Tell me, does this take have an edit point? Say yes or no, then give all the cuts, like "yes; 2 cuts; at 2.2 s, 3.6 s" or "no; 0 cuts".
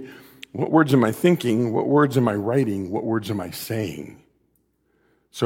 no; 0 cuts